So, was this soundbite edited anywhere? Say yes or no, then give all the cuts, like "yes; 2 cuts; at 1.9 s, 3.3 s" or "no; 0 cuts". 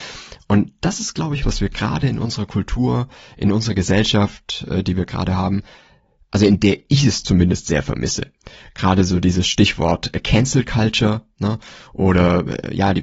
yes; 1 cut; at 1.4 s